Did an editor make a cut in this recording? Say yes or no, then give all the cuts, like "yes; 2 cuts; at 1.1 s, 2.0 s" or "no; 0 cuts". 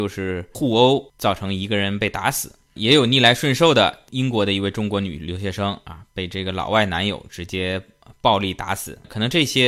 no; 0 cuts